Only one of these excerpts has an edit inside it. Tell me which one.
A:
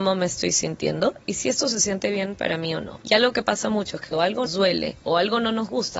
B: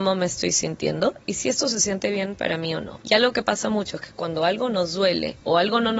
A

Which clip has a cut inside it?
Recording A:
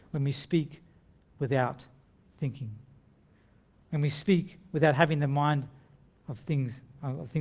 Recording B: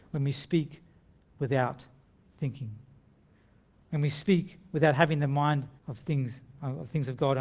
B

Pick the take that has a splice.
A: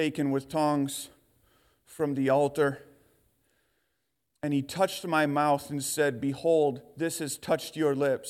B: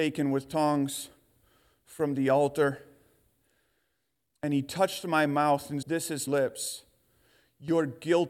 B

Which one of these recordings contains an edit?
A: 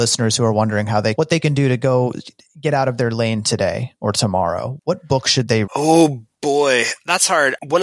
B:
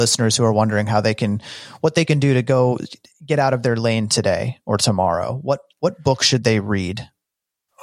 A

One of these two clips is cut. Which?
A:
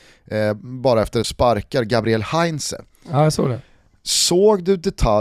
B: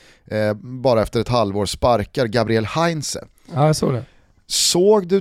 A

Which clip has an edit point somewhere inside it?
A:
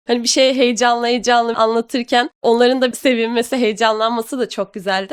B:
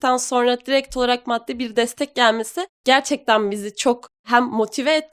A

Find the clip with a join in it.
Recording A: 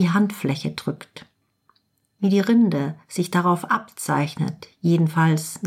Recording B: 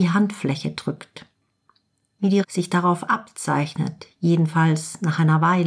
B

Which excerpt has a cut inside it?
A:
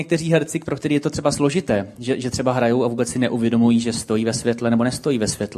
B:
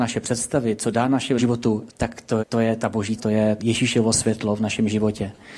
B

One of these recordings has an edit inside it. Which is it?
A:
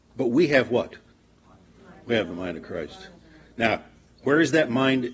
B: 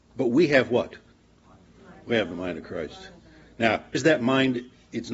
B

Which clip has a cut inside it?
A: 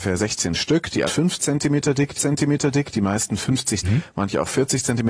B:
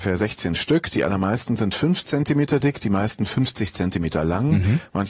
A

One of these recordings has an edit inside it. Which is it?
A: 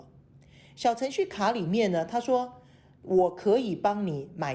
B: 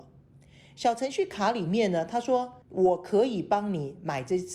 B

